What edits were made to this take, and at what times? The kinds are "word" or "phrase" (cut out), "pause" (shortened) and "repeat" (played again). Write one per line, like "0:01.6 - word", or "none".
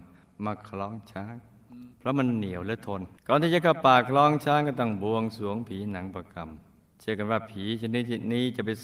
0:01.9 - pause
0:03.2 - pause
0:06.9 - pause